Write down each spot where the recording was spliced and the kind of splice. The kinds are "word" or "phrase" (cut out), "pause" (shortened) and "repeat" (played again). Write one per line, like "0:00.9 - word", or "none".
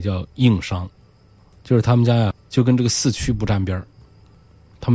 0:02.3 - word